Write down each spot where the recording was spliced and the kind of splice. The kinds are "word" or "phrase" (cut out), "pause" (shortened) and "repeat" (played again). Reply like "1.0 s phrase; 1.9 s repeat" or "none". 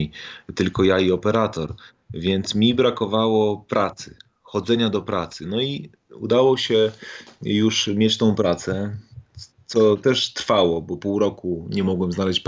none

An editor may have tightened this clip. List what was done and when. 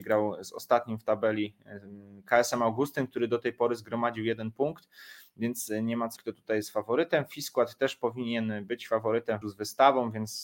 6.2 s word; 9.4 s word

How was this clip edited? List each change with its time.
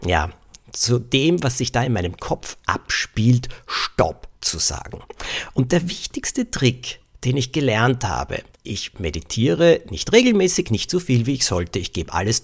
4.3 s pause; 8.5 s pause

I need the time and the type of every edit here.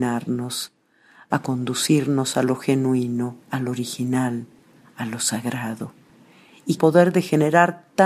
3.4 s pause; 6.8 s phrase

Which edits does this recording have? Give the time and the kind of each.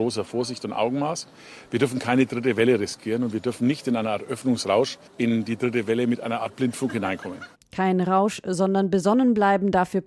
5.1 s pause

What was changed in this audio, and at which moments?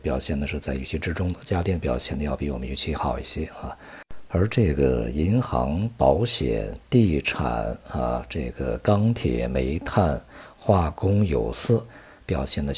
none

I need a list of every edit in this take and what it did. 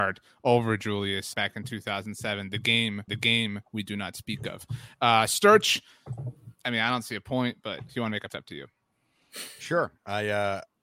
1.3 s word; 3.1 s repeat; 6.6 s pause; 7.9 s word; 8.3 s phrase

